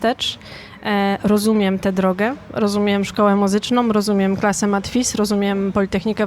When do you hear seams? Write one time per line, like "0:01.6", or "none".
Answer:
none